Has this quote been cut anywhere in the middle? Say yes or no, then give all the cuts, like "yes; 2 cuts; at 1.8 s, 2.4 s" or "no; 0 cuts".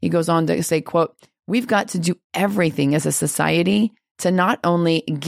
no; 0 cuts